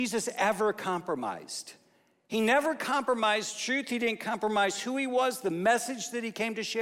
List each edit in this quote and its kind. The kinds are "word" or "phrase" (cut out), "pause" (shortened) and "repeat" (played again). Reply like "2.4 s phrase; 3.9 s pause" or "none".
none